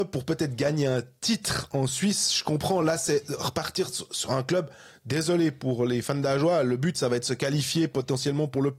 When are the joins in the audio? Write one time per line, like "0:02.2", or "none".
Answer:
none